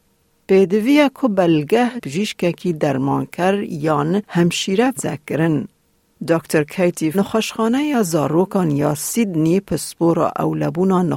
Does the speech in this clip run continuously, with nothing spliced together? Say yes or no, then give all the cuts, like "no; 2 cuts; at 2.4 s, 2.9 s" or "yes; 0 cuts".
no; 3 cuts; at 2.0 s, 5.0 s, 7.1 s